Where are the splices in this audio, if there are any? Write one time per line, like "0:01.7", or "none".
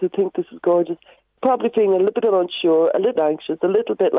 0:01.4
0:02.2
0:03.2